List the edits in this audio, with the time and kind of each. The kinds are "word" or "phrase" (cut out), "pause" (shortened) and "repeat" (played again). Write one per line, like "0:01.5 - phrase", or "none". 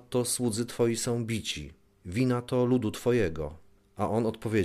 none